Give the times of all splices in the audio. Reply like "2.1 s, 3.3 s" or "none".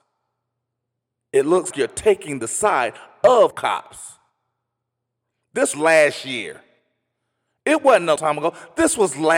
1.7 s, 3.5 s, 5.7 s, 8.2 s